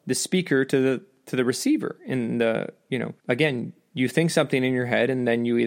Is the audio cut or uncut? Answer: cut